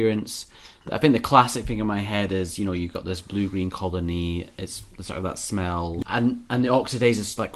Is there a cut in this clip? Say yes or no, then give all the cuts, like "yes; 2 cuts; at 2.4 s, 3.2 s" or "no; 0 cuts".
no; 0 cuts